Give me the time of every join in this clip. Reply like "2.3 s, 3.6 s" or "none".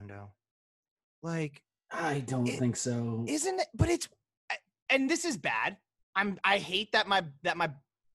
4.9 s